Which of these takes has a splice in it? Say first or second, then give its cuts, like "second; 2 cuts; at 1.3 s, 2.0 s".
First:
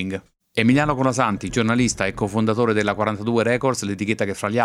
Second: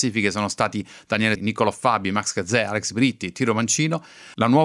second; 1 cut; at 1.4 s